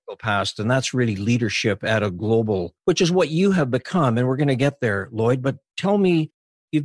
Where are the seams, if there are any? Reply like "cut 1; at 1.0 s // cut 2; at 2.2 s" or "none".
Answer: cut 1; at 2.8 s

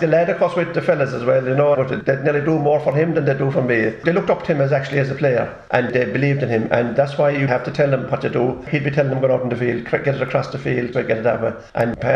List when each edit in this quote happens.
cut 1; at 1.7 s // cut 2; at 7.5 s // cut 3; at 10.9 s

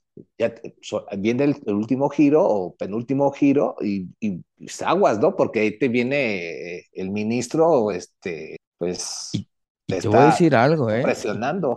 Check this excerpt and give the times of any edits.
none

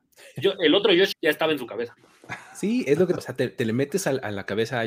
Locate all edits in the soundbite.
cut 1; at 1.1 s // cut 2; at 3.2 s

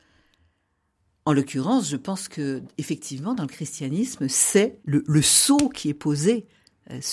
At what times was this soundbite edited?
cut 1; at 4.8 s

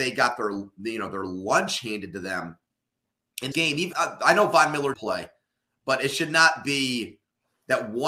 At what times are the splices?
cut 1; at 3.5 s // cut 2; at 3.9 s // cut 3; at 4.9 s

